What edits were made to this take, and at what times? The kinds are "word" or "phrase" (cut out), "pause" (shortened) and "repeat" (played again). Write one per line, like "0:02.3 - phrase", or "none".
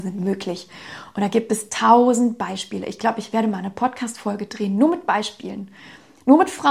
none